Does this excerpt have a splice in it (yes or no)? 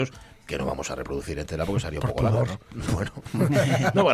no